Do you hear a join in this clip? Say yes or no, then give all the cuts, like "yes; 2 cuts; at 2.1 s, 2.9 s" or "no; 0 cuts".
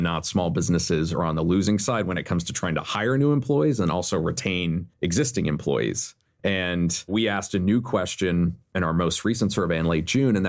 no; 0 cuts